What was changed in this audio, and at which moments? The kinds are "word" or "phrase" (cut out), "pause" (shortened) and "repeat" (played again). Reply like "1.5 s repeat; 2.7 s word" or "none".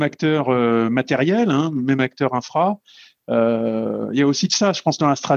none